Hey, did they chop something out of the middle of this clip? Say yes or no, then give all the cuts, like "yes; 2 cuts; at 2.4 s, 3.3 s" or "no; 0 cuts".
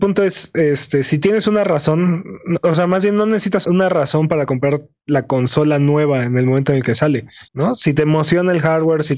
yes; 2 cuts; at 3.6 s, 7.5 s